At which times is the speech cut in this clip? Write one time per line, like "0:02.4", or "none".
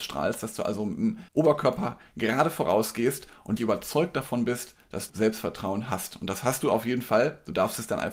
0:01.3
0:03.6
0:05.1